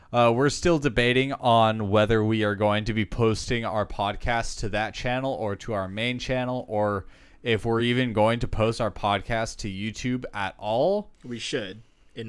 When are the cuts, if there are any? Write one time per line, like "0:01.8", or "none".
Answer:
none

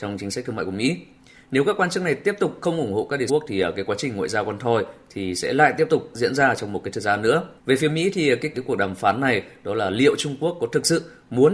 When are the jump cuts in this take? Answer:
0:01.2
0:03.3
0:06.1
0:07.6
0:08.5

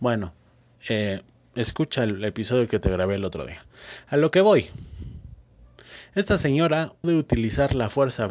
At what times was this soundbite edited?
0:07.0

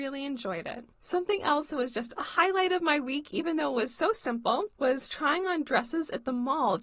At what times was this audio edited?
0:00.9
0:04.7

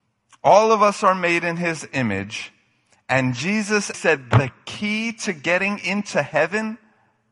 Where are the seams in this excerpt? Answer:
0:03.9

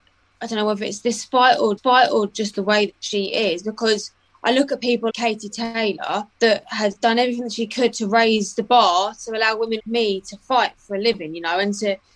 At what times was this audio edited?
0:01.8
0:05.1
0:06.3
0:09.8

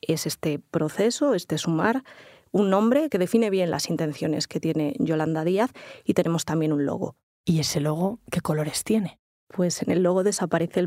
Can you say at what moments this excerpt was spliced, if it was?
none

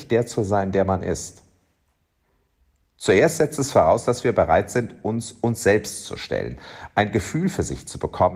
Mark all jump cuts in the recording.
none

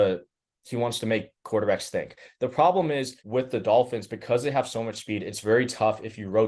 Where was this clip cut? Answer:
0:01.3
0:03.2

